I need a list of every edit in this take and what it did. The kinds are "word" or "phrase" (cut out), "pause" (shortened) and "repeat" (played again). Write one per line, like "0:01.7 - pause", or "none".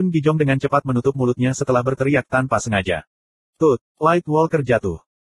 0:03.9 - pause